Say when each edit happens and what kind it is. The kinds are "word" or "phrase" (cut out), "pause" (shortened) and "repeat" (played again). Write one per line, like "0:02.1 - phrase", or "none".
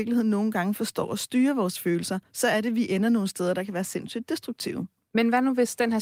none